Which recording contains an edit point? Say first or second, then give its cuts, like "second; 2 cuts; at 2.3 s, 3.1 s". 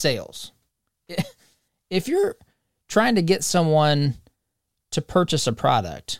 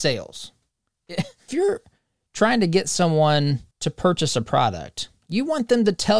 second; 2 cuts; at 1.5 s, 3.7 s